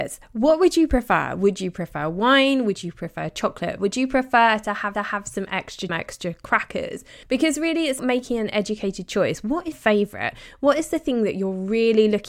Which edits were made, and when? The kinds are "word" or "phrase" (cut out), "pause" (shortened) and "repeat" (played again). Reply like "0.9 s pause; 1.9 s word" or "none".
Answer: 4.9 s repeat; 5.9 s phrase; 7.2 s pause; 8.0 s word; 9.7 s word